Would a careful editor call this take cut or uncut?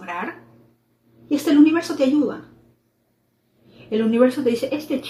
uncut